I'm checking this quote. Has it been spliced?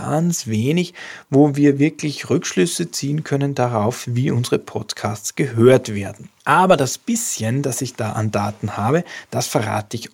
yes; 1 cut; at 6.4 s

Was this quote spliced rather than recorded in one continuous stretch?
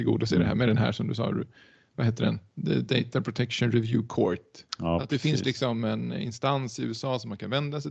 yes; 1 cut; at 4.7 s

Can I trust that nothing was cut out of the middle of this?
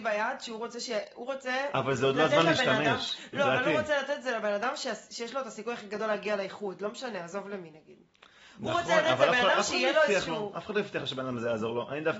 yes; 0 cuts

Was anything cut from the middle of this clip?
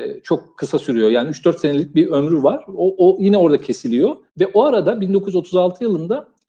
yes; 1 cut; at 4.3 s

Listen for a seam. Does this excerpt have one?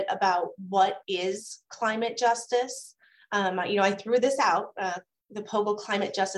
no; 0 cuts

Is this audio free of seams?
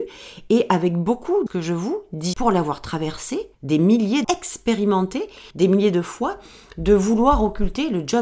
no; 5 cuts; at 1.5 s, 2.3 s, 3.5 s, 4.2 s, 5.5 s

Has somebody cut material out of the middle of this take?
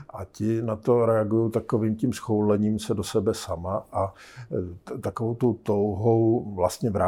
no; 0 cuts

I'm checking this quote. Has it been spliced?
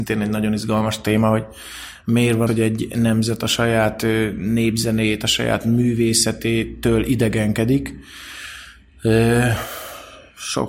yes; 1 cut; at 2.5 s

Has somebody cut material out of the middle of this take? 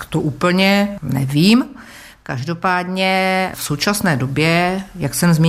no; 0 cuts

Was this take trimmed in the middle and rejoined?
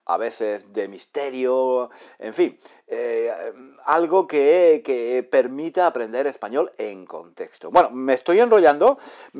no; 0 cuts

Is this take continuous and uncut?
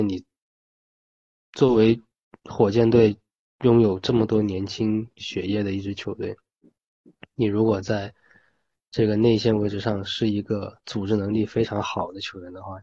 yes; 0 cuts

